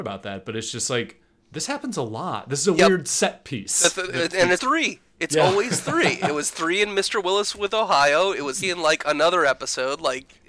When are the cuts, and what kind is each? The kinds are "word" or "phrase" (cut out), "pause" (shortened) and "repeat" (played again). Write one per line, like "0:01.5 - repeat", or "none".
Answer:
0:04.6 - word
0:08.6 - word